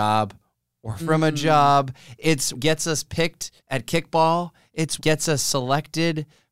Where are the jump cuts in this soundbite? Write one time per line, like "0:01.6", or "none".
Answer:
0:01.0
0:02.5
0:03.6
0:05.0